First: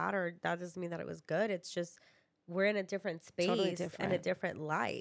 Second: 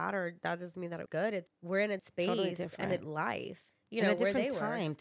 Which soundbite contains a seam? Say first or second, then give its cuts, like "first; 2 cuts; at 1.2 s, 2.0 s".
second; 5 cuts; at 1.1 s, 1.5 s, 2.0 s, 3.0 s, 3.7 s